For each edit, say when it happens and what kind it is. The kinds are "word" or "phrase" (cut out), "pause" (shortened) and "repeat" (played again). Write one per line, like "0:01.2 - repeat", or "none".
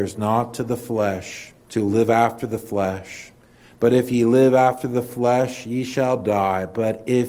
0:01.6 - pause